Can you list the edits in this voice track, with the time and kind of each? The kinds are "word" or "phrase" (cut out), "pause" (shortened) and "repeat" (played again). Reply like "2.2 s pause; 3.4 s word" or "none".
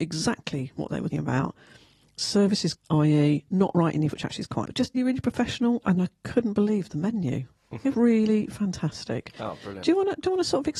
1.1 s word; 2.7 s word; 4.1 s word; 4.6 s word; 5.0 s word; 6.0 s word; 7.9 s word